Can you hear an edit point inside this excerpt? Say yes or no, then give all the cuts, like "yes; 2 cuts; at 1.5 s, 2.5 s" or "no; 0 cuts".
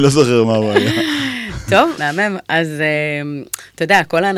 yes; 1 cut; at 2.0 s